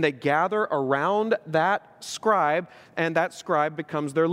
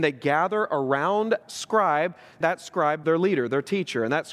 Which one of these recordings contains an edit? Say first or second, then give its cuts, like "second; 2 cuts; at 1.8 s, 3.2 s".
second; 3 cuts; at 1.4 s, 2.4 s, 3.0 s